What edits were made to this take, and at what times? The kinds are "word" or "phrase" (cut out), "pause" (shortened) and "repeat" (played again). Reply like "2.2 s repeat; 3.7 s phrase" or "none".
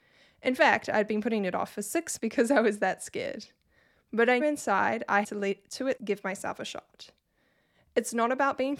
2.2 s word; 4.4 s word; 5.2 s word; 6.0 s word